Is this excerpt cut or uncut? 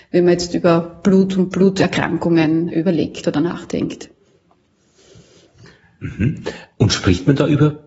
uncut